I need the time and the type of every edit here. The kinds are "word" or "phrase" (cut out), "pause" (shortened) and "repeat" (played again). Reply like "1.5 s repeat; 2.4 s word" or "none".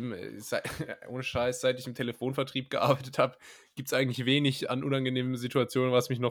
none